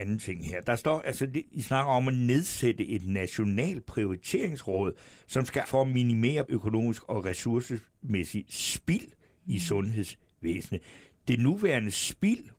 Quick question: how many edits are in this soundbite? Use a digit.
3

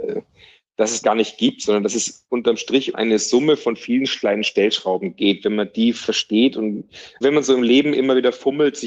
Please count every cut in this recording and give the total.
3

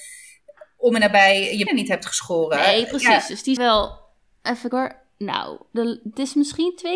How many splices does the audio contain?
3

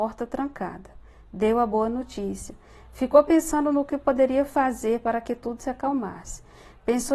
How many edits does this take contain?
0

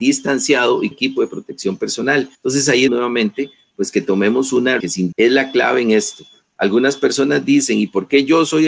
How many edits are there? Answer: 5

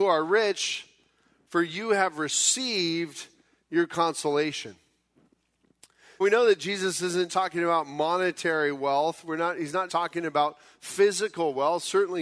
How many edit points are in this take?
3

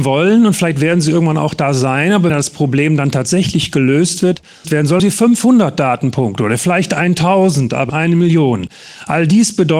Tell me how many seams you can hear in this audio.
4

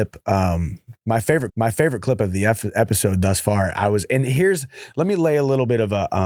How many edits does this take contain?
1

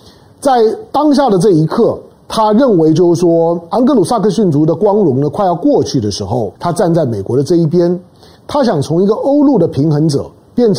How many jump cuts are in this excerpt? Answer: 1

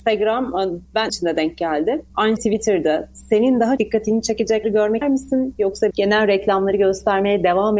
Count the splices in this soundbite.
6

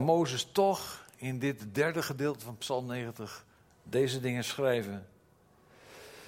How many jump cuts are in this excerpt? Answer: 0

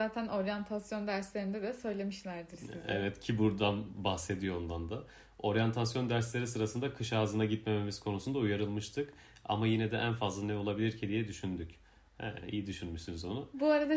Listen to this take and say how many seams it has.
0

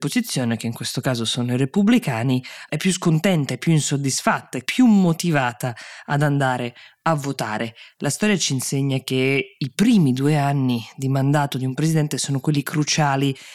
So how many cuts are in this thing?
1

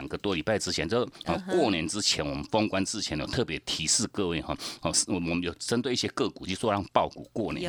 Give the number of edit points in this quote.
0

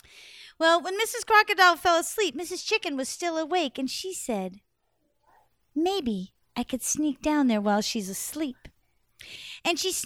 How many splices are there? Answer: 0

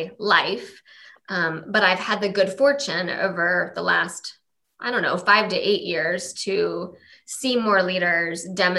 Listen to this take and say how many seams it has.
0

